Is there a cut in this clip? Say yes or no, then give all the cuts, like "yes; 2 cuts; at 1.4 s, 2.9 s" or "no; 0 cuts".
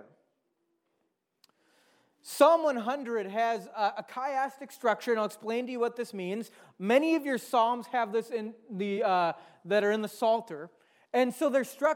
no; 0 cuts